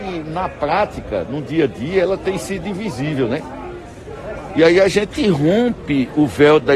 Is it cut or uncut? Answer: uncut